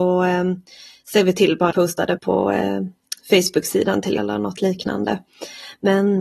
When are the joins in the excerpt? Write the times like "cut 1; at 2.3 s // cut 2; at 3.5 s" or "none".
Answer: cut 1; at 1.7 s // cut 2; at 2.2 s // cut 3; at 4.2 s